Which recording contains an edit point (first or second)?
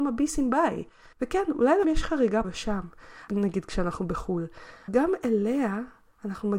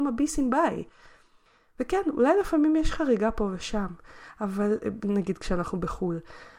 first